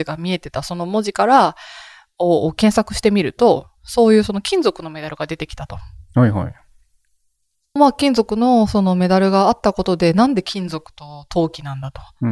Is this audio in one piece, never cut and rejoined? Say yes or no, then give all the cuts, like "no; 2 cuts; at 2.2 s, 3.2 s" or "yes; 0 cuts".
no; 1 cut; at 7.8 s